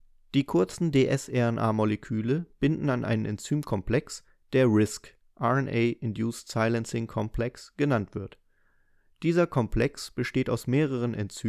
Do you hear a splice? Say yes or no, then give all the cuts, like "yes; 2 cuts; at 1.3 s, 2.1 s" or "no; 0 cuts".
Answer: no; 0 cuts